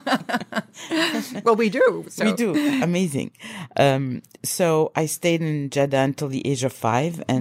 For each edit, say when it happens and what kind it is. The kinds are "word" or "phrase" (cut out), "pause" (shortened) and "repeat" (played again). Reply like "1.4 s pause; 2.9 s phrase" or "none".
none